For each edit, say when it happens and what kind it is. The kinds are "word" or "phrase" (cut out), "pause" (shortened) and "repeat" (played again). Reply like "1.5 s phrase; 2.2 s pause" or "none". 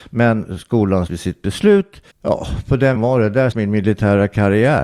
1.1 s phrase; 2.1 s pause; 2.9 s word; 3.5 s word